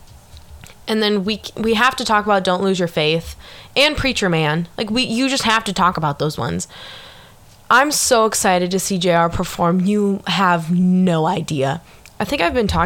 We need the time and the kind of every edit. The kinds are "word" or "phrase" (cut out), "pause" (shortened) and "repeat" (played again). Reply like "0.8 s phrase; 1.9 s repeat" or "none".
none